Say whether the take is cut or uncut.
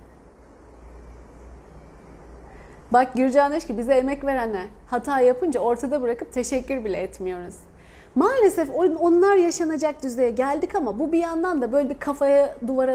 uncut